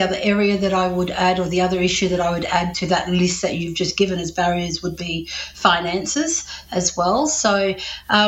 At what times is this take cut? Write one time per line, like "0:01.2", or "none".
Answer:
0:02.7